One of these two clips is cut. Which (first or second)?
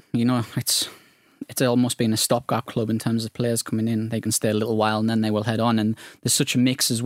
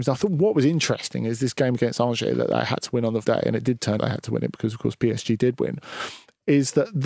second